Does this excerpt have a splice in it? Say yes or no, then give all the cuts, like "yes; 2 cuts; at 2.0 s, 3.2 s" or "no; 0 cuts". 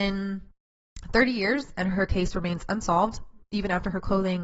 no; 0 cuts